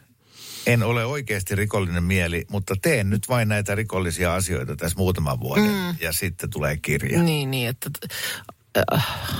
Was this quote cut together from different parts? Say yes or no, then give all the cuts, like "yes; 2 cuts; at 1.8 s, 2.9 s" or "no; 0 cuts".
no; 0 cuts